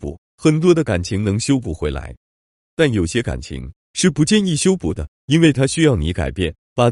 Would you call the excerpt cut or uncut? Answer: uncut